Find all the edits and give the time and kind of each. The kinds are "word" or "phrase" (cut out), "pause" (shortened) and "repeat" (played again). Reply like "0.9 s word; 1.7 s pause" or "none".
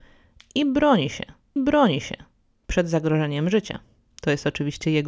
1.6 s repeat

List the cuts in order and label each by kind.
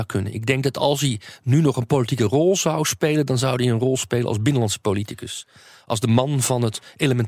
none

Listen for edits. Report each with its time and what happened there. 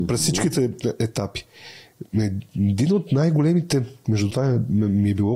4.3 s word

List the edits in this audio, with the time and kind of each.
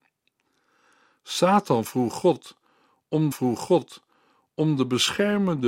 3.3 s repeat

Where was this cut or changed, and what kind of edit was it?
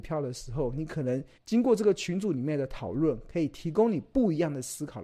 1.4 s pause

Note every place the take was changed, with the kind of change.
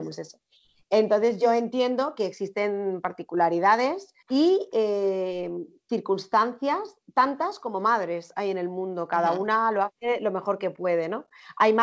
4.2 s pause

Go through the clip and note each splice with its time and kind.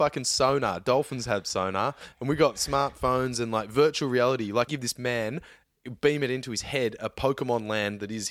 4.7 s phrase

